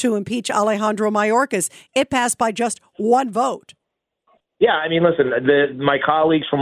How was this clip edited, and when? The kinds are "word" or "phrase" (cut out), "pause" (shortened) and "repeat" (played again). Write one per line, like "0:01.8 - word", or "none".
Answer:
none